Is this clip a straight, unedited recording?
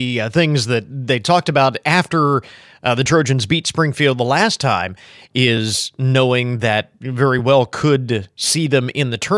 yes; 0 cuts

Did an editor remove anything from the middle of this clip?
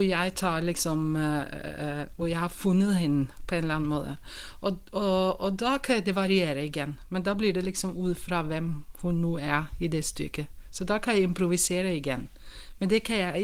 no; 0 cuts

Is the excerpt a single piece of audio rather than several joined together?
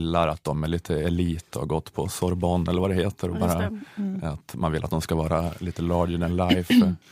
yes; 0 cuts

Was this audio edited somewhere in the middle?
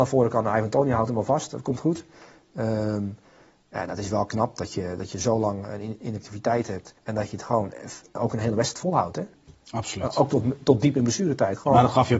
yes; 1 cut; at 7.0 s

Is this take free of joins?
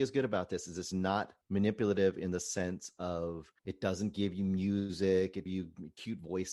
no; 3 cuts; at 1.4 s, 3.6 s, 5.5 s

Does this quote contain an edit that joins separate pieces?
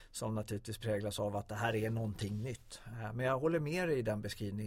no; 0 cuts

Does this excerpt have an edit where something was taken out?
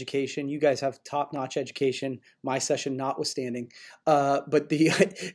no; 0 cuts

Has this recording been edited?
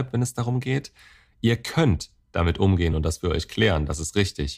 no; 0 cuts

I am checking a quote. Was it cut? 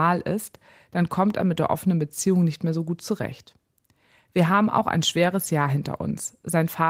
no; 0 cuts

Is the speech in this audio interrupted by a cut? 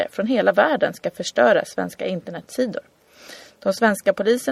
no; 0 cuts

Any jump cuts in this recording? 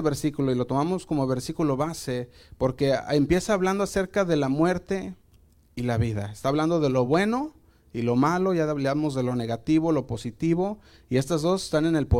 no; 0 cuts

